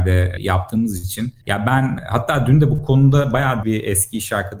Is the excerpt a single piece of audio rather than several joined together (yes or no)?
no